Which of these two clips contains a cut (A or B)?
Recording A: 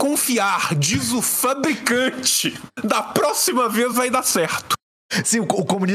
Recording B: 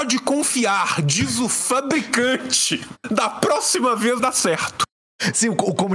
B